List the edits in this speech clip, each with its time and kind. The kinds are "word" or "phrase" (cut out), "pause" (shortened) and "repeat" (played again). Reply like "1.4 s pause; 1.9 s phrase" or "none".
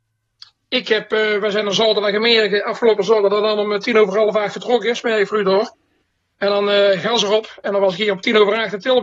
none